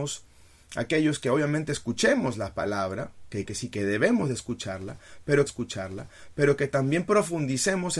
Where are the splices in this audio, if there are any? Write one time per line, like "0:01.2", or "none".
0:03.5
0:05.5